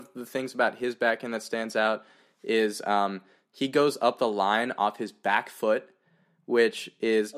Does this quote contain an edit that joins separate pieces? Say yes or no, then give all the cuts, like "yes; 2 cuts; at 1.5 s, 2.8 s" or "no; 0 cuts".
no; 0 cuts